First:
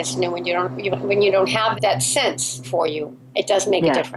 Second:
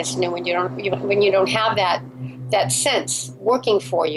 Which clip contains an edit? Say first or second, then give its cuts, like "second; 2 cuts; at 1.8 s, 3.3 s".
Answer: first; 2 cuts; at 1.7 s, 2.6 s